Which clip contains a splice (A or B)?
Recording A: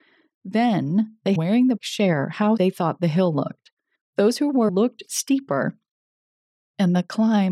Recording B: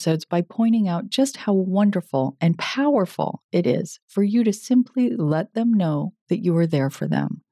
A